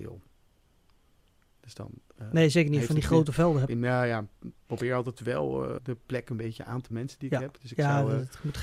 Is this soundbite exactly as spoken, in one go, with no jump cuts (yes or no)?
no